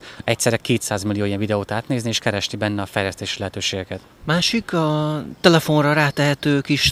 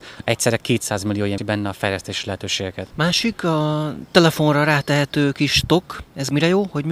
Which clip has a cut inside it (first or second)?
second